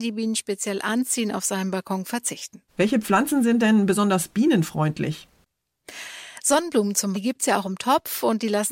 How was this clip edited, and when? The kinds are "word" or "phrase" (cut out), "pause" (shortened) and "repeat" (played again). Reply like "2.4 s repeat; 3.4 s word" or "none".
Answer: 2.7 s pause; 7.1 s word